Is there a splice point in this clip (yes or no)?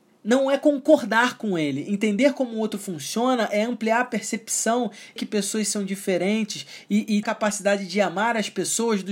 yes